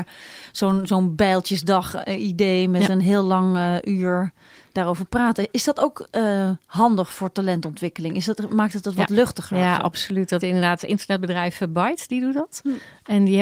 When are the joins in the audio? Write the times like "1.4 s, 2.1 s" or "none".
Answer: 10.4 s